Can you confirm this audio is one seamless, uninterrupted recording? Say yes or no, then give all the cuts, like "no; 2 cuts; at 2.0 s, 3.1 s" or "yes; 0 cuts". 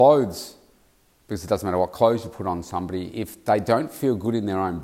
yes; 0 cuts